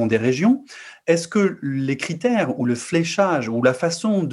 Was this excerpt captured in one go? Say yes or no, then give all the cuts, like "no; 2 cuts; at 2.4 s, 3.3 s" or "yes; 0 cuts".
yes; 0 cuts